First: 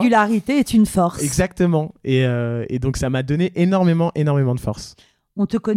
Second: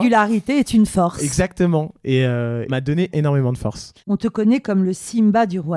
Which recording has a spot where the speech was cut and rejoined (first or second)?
second